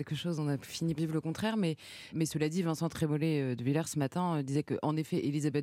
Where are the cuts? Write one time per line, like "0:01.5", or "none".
0:01.0
0:02.1